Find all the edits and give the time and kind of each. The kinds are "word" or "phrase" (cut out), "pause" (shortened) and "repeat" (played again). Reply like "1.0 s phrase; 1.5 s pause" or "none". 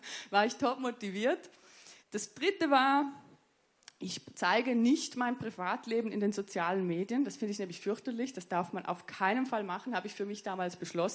2.0 s pause